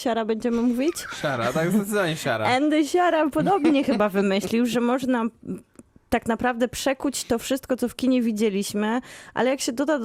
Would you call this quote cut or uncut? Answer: uncut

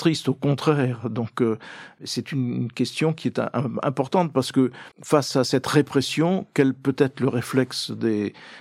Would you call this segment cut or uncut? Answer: cut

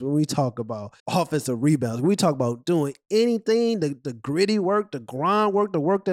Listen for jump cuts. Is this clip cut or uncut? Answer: cut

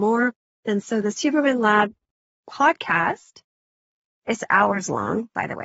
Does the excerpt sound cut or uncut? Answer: uncut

